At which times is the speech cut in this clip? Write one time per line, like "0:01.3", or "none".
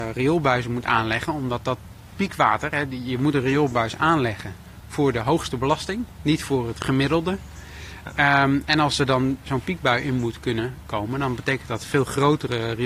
none